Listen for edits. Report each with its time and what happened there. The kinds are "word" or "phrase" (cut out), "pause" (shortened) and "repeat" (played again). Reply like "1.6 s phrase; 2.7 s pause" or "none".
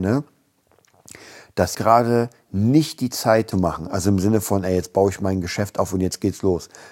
1.7 s word; 3.5 s phrase